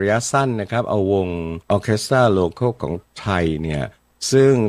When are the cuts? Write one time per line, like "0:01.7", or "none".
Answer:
0:01.6